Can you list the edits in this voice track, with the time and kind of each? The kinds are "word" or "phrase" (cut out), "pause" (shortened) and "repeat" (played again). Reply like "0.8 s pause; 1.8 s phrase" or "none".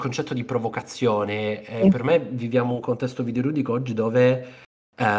none